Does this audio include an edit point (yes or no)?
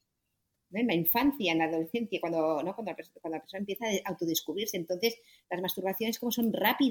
no